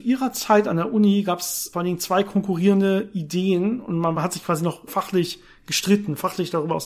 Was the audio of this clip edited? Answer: yes; 3 cuts; at 1.7 s, 4.2 s, 4.9 s

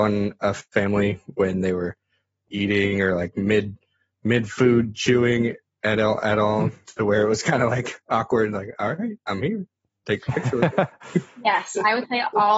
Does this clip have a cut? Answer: no; 0 cuts

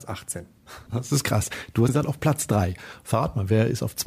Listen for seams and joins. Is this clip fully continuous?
no; 1 cut; at 1.9 s

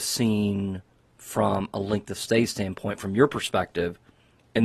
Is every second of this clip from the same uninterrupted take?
yes; 0 cuts

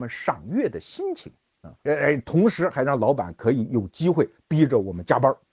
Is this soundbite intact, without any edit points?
no; 1 cut; at 1.8 s

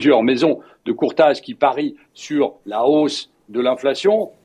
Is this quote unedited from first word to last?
yes; 0 cuts

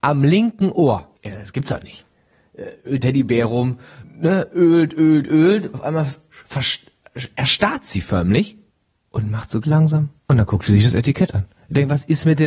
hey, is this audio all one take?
no; 6 cuts; at 1.2 s, 3.0 s, 5.7 s, 8.7 s, 9.6 s, 10.2 s

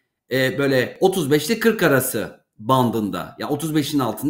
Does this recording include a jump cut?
no; 0 cuts

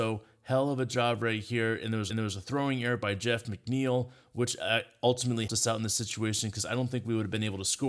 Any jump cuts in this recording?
yes; 2 cuts; at 2.1 s, 5.5 s

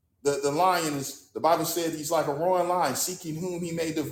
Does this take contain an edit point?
no; 0 cuts

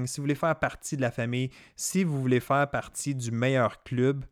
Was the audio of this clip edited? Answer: no; 0 cuts

